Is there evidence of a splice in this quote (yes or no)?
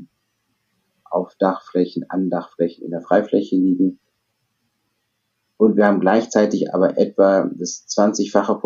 no